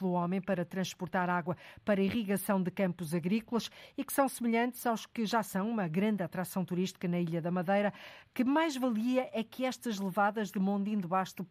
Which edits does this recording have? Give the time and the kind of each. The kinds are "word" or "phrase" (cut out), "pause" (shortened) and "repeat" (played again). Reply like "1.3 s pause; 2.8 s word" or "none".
none